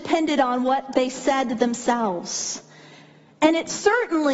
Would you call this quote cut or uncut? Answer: uncut